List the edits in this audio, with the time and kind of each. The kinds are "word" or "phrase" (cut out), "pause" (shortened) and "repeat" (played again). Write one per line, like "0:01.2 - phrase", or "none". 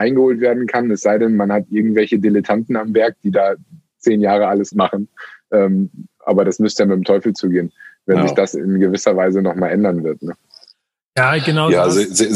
0:04.7 - word

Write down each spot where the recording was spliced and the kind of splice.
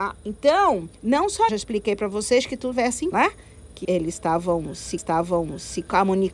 0:00.9 - pause
0:01.5 - phrase
0:02.7 - word
0:03.1 - word
0:03.8 - word
0:05.0 - repeat

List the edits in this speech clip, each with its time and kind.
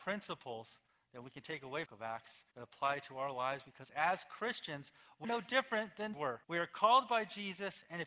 0:01.9 - phrase
0:02.5 - pause
0:05.2 - word
0:06.1 - phrase
0:06.4 - pause

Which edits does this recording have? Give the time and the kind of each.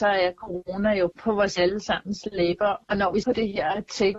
0:03.2 - word

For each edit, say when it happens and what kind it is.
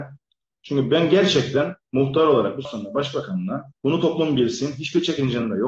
0:01.8 - pause
0:02.6 - word
0:03.8 - pause

